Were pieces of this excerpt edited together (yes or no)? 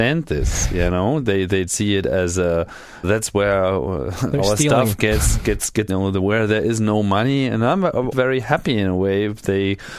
yes